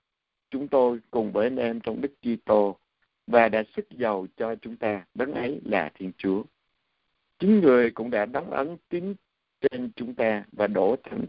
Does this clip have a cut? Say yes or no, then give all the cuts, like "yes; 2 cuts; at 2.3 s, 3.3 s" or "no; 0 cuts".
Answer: yes; 1 cut; at 5.1 s